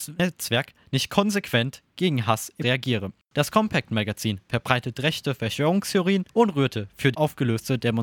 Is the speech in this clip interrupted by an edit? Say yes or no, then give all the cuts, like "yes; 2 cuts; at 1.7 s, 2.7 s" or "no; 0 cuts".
yes; 4 cuts; at 2.6 s, 3.2 s, 4.4 s, 7.1 s